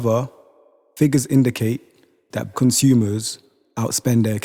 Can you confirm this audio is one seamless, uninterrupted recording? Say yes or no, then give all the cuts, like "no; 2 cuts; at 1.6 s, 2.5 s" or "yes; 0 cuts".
no; 1 cut; at 2.5 s